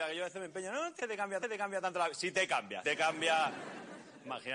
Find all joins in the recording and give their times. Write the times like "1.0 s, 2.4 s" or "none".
1.0 s, 1.4 s, 2.8 s

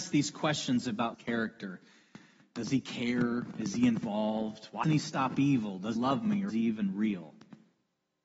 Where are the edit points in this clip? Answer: 1.1 s, 4.8 s, 6.0 s, 6.5 s

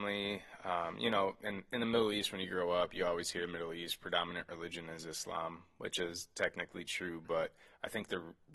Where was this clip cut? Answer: none

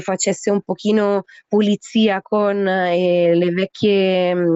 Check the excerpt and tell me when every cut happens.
none

